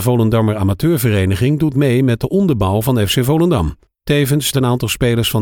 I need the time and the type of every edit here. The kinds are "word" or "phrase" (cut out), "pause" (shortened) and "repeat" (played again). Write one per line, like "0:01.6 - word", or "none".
0:01.7 - word
0:04.5 - word